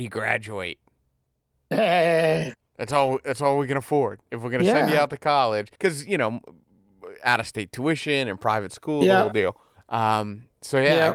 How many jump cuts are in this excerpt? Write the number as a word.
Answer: three